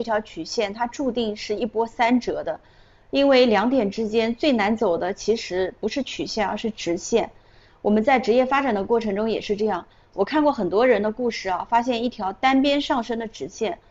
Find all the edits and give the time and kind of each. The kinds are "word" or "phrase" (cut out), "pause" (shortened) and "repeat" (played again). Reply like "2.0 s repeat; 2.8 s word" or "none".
none